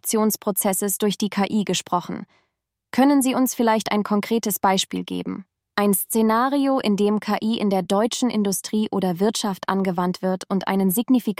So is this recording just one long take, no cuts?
yes; 0 cuts

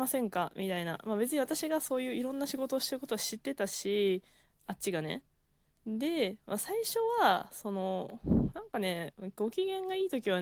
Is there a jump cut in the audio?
no; 0 cuts

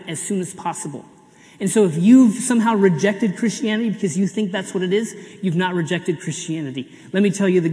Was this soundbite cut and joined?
no; 0 cuts

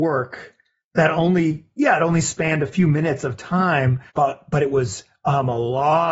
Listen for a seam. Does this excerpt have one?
yes; 1 cut; at 4.1 s

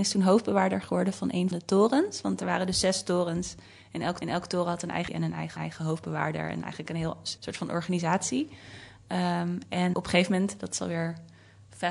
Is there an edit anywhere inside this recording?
yes; 6 cuts; at 1.5 s, 4.2 s, 5.1 s, 5.6 s, 7.4 s, 9.9 s

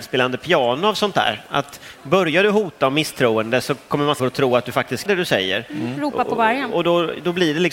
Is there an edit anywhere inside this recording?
yes; 2 cuts; at 4.2 s, 5.1 s

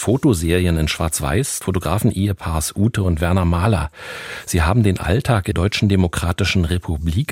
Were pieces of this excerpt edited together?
yes; 2 cuts; at 1.6 s, 5.5 s

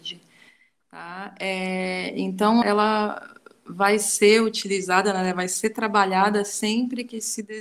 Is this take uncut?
no; 1 cut; at 2.6 s

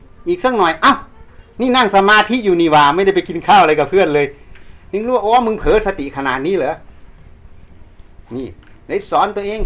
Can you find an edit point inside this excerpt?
yes; 1 cut; at 8.3 s

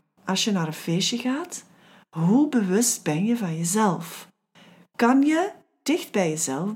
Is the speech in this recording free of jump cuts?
yes; 0 cuts

